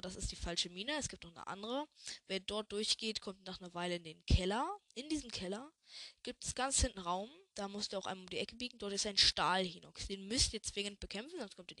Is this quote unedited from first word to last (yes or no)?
no